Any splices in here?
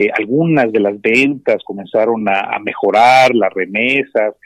no; 0 cuts

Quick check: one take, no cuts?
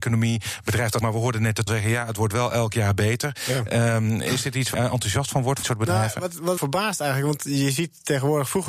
no; 5 cuts; at 1.0 s, 1.7 s, 4.7 s, 5.6 s, 6.6 s

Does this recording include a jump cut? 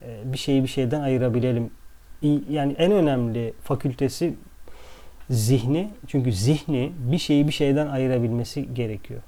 yes; 1 cut; at 2.7 s

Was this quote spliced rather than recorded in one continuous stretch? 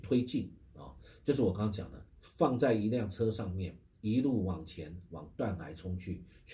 yes; 1 cut; at 2.1 s

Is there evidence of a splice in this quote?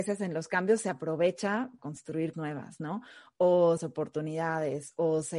yes; 3 cuts; at 1.8 s, 2.3 s, 3.8 s

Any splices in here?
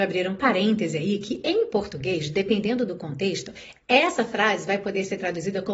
no; 0 cuts

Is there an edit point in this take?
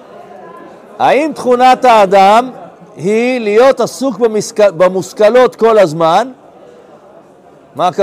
no; 0 cuts

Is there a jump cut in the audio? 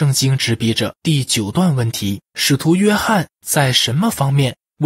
yes; 2 cuts; at 1.0 s, 2.2 s

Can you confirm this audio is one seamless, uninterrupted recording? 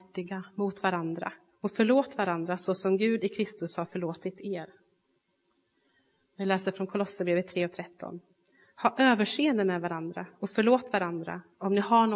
yes; 0 cuts

